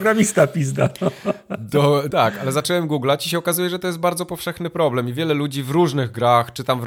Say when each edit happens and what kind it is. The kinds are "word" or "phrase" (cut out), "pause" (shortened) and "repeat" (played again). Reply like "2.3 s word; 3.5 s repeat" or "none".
2.1 s word